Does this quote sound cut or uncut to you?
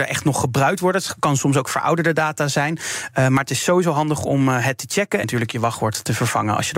cut